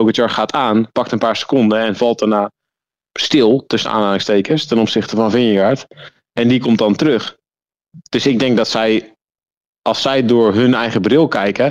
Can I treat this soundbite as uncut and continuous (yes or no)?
yes